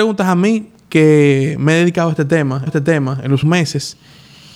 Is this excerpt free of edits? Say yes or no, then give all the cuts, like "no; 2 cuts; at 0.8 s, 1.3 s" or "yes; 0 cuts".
no; 2 cuts; at 2.7 s, 3.4 s